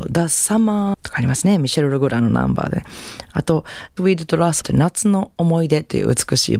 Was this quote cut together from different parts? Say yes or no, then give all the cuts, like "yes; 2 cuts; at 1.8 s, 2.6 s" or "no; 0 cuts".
yes; 3 cuts; at 0.9 s, 4.0 s, 4.6 s